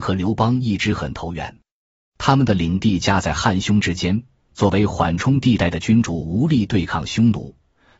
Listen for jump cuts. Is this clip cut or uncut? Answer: uncut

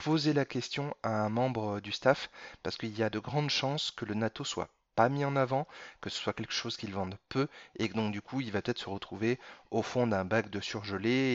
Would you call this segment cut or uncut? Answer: uncut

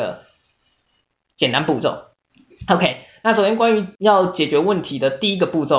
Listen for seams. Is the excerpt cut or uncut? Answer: cut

